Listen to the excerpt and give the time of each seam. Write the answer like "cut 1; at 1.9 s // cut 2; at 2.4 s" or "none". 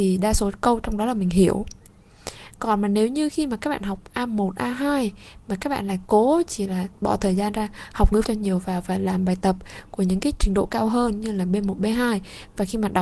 cut 1; at 8.2 s